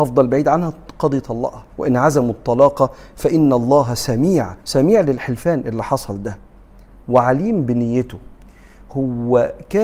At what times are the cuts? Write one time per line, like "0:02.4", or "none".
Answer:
0:01.7
0:04.6